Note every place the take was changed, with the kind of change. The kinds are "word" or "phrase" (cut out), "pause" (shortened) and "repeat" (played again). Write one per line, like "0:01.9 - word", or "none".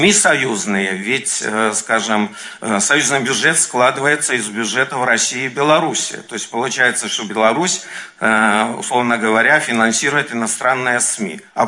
none